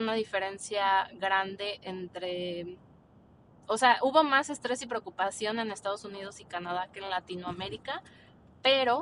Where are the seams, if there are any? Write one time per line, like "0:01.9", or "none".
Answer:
none

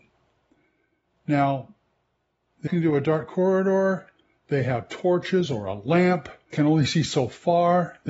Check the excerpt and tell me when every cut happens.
0:02.7
0:06.5

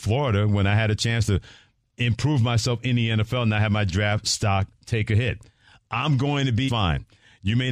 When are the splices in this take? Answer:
0:06.7

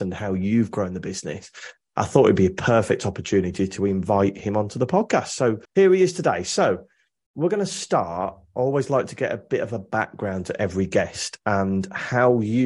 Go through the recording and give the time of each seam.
0:05.6

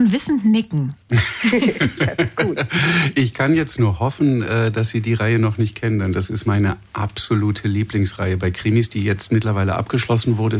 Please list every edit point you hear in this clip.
0:01.0

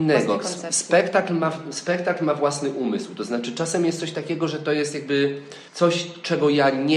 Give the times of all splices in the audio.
0:05.7

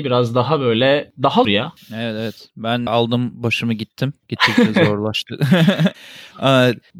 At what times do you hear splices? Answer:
0:01.4
0:02.9
0:04.2
0:05.9

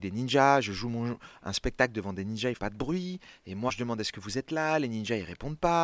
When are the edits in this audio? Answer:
0:02.6
0:03.7

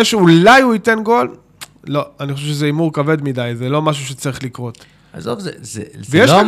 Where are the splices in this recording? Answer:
none

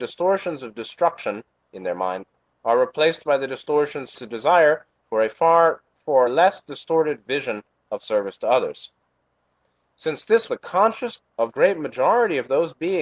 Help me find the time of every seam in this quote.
0:04.1
0:06.3
0:10.5
0:11.2
0:11.5

